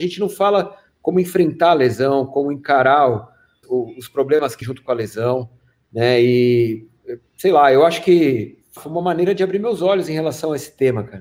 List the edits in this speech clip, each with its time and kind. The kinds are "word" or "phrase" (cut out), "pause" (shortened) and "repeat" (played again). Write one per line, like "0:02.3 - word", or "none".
0:03.6 - word
0:04.6 - word
0:08.8 - word